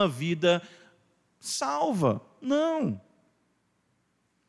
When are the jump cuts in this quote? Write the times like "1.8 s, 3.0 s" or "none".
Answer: none